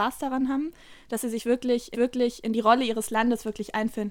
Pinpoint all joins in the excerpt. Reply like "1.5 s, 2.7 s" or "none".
1.9 s